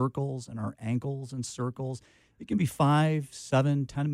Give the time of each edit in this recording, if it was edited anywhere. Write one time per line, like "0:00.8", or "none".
none